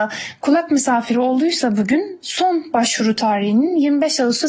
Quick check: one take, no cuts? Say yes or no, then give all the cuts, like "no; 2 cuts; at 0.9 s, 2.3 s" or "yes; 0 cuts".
yes; 0 cuts